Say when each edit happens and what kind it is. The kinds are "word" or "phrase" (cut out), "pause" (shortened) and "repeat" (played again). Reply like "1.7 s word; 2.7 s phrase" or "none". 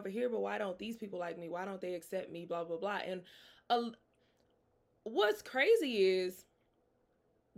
none